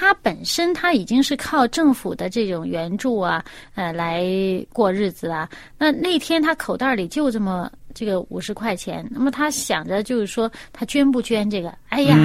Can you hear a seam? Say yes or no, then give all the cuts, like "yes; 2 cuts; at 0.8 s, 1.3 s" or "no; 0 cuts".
no; 0 cuts